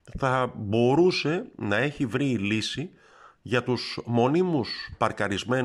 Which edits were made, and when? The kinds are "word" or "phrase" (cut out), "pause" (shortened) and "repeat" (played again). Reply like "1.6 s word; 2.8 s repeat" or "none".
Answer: none